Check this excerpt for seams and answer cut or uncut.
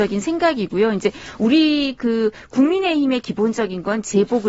uncut